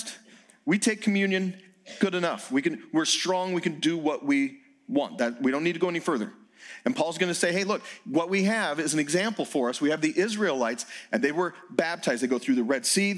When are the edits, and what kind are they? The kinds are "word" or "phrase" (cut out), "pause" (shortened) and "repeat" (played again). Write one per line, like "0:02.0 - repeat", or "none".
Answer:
none